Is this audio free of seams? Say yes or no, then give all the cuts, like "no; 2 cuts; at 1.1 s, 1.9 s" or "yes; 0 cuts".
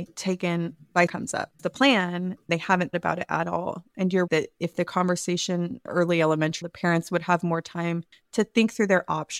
no; 7 cuts; at 1.1 s, 1.6 s, 2.5 s, 2.9 s, 4.3 s, 5.9 s, 6.6 s